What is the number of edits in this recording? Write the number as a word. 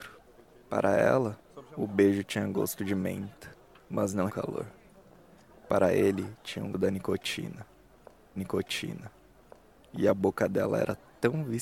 three